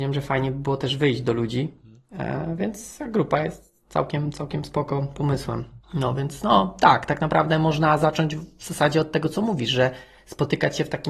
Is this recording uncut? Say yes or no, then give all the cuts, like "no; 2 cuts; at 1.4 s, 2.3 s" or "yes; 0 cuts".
yes; 0 cuts